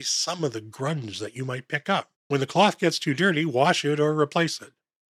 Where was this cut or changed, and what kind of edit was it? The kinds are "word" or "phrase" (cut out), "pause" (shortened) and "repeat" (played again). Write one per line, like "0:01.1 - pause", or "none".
0:02.2 - pause